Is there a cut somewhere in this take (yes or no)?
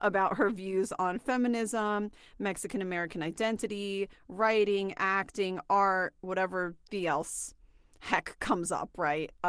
no